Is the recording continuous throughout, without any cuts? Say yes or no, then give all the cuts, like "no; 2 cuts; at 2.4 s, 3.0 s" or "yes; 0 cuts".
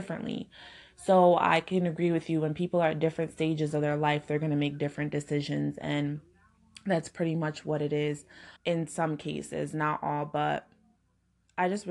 no; 1 cut; at 8.6 s